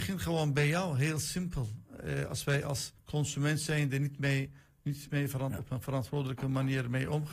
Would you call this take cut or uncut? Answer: cut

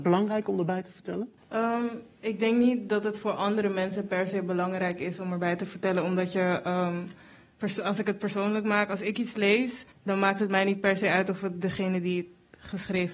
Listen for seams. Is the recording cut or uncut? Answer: cut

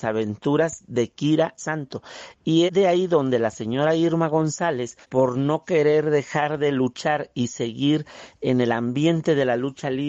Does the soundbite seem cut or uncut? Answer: cut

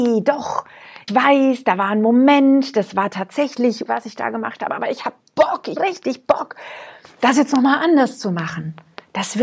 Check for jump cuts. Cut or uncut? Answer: cut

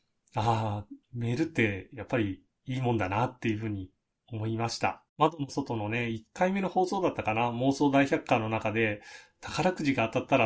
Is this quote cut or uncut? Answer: cut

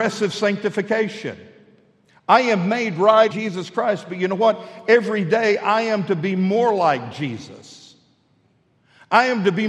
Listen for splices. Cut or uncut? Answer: cut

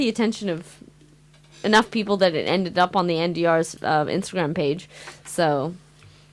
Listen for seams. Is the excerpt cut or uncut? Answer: uncut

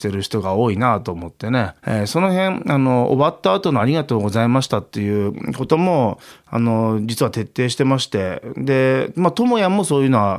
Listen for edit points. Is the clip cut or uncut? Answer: cut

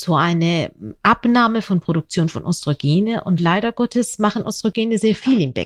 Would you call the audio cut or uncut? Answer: uncut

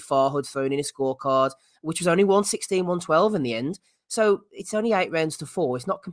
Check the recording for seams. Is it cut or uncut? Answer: uncut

